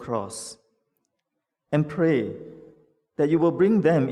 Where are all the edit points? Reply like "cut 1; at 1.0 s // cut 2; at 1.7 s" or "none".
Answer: none